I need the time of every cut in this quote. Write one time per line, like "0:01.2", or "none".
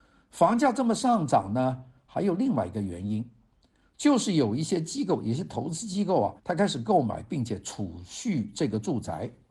0:06.4